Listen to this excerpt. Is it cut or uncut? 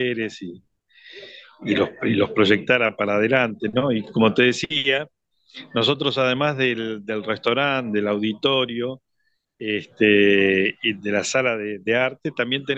uncut